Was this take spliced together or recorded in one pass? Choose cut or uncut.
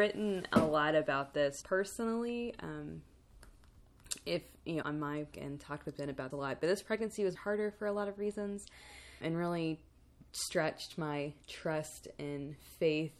cut